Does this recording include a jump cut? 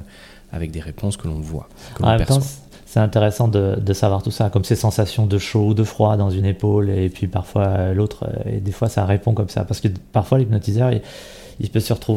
no; 0 cuts

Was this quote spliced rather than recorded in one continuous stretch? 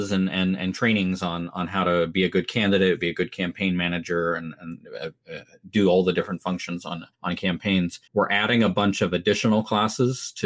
yes; 2 cuts; at 7.1 s, 8.1 s

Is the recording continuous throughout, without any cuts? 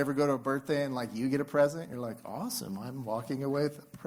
yes; 0 cuts

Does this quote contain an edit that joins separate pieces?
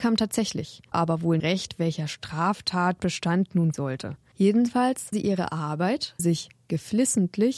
yes; 5 cuts; at 0.9 s, 1.4 s, 3.7 s, 5.1 s, 6.2 s

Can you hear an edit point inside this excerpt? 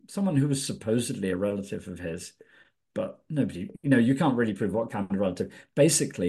no; 0 cuts

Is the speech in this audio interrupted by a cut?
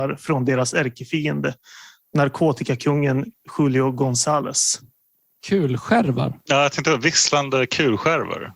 no; 0 cuts

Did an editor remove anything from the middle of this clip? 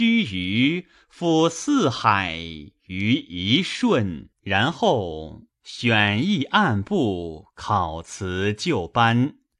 yes; 1 cut; at 4.3 s

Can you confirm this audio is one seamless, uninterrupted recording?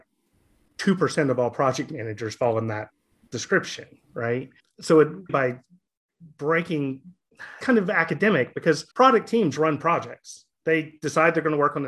no; 4 cuts; at 5.3 s, 7.6 s, 8.9 s, 10.5 s

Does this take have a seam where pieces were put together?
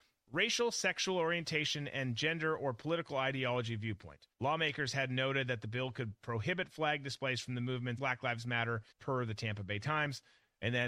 yes; 3 cuts; at 4.3 s, 8.0 s, 8.9 s

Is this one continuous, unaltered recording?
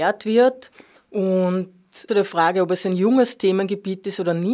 no; 1 cut; at 2.1 s

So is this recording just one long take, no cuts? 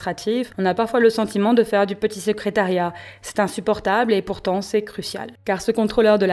yes; 0 cuts

